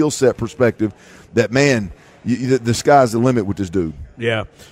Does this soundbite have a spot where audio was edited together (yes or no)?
no